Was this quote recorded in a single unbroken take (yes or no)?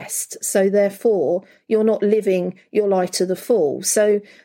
yes